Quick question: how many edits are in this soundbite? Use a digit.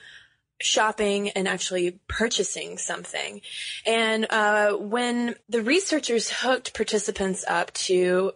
1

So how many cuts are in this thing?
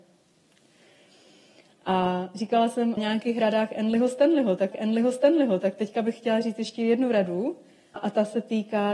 3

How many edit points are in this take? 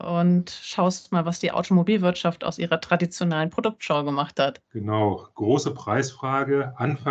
1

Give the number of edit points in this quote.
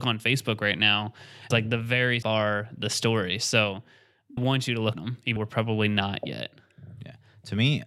5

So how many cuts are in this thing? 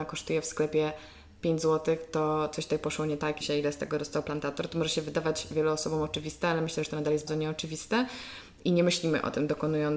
2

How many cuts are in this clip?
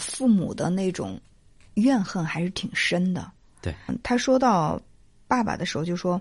1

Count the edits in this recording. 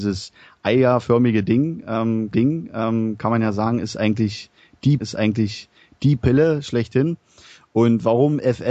2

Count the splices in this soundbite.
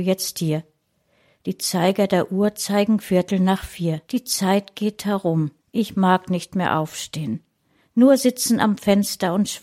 2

